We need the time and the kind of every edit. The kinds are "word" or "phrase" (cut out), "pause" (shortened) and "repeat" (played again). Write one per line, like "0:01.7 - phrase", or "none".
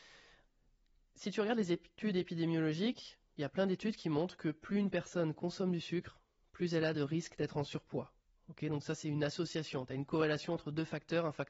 none

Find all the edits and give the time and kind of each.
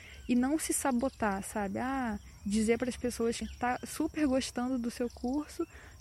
0:03.4 - phrase

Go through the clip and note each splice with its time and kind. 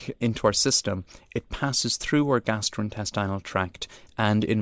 none

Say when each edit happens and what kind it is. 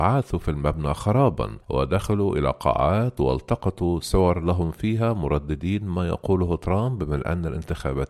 0:01.6 - pause

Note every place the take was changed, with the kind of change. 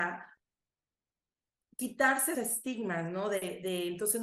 0:02.3 - phrase

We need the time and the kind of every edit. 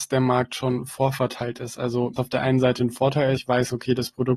0:02.2 - word
0:03.4 - phrase

